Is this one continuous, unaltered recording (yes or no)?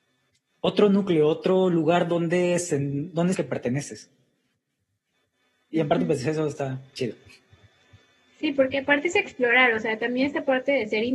no